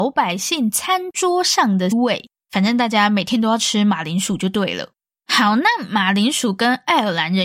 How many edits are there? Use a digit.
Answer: 1